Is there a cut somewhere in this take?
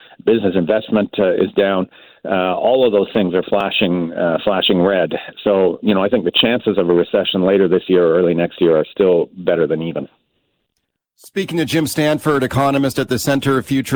no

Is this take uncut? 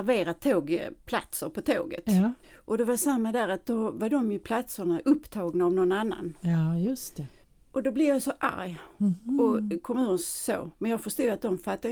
no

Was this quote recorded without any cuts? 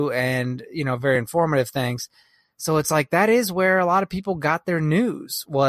yes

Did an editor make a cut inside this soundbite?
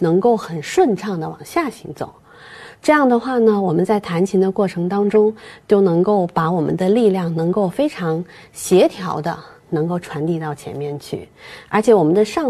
no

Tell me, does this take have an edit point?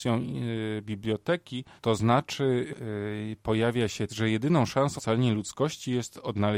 yes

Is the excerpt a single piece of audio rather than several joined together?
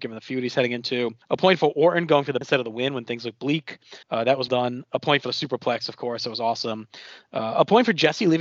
no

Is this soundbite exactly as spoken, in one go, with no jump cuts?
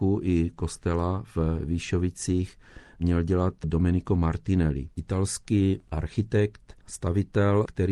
yes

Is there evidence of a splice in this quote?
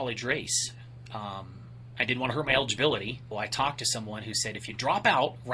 yes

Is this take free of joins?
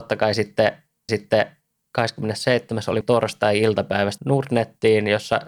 no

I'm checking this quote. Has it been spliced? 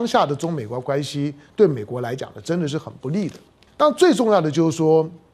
yes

